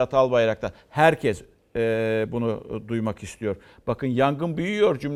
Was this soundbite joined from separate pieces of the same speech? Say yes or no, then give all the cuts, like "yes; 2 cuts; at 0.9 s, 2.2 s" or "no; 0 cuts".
no; 0 cuts